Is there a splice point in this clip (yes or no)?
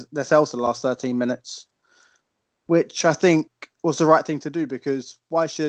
no